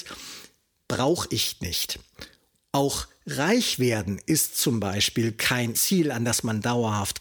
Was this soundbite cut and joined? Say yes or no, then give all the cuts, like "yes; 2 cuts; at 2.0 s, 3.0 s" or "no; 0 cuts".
yes; 1 cut; at 5.7 s